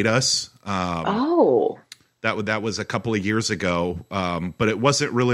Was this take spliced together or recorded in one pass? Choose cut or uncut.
uncut